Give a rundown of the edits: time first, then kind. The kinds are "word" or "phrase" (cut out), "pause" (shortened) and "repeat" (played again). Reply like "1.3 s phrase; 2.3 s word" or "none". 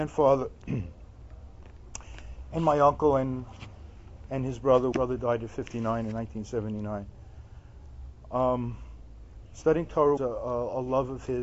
4.9 s phrase; 10.2 s word

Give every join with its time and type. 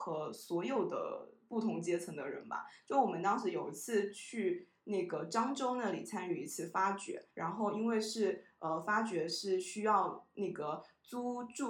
7.3 s pause

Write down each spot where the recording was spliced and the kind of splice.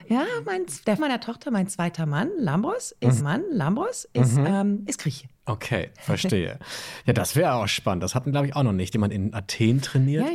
1.0 s word; 3.2 s repeat; 5.4 s pause; 8.9 s word

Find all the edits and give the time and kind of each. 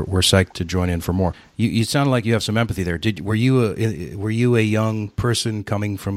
none

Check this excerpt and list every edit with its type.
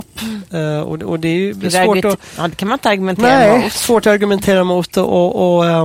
none

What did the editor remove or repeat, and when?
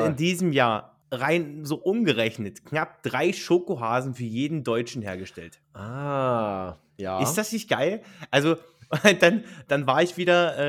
1.0 s pause; 5.6 s pause

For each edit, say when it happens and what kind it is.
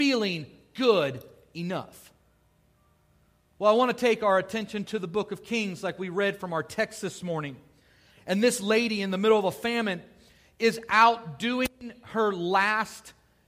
none

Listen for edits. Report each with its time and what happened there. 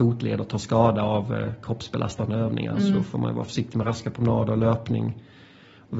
none

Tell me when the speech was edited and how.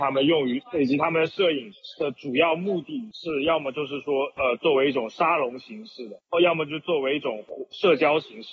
none

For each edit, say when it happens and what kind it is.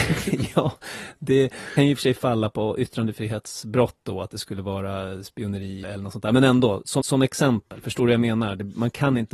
1.8 s phrase; 5.8 s word; 7.0 s repeat

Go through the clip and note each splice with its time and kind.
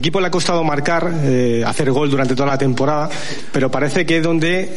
none

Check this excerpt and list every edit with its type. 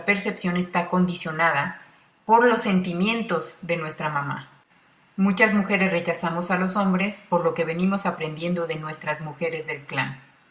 none

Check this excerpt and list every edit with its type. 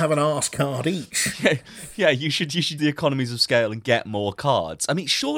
2.8 s word

